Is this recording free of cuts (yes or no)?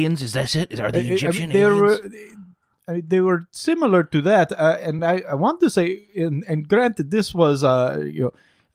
yes